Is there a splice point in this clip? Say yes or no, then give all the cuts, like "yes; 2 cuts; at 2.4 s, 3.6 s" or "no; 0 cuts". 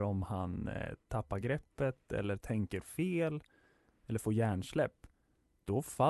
no; 0 cuts